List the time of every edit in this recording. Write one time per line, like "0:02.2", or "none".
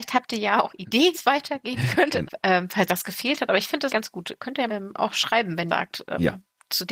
0:01.1
0:02.2
0:02.9
0:03.9
0:04.7
0:05.7